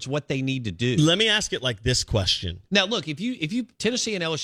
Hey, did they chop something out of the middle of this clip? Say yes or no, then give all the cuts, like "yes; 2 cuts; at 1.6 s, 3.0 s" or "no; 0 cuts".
no; 0 cuts